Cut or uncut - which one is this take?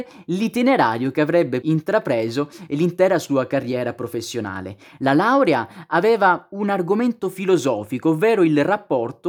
cut